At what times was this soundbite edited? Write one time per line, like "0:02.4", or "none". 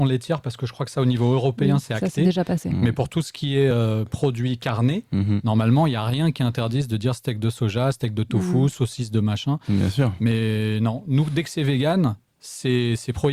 none